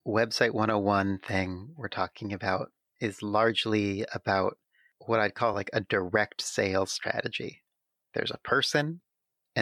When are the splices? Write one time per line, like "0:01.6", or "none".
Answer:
none